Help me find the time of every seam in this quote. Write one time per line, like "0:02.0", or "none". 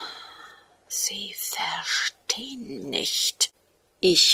0:02.8